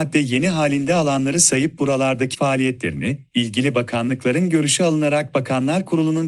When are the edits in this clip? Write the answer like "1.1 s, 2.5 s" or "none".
2.3 s